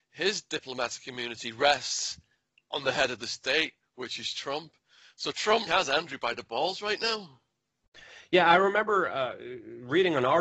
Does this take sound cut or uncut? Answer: cut